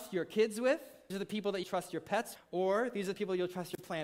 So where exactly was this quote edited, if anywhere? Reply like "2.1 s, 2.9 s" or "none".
1.1 s, 1.6 s, 2.3 s